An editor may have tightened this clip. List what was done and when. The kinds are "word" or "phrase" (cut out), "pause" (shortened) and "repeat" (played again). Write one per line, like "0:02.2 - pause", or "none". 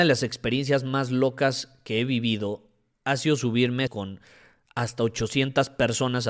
0:03.9 - word